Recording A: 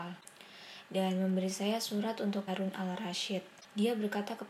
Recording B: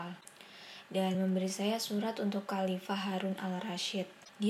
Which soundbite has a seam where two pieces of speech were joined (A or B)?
A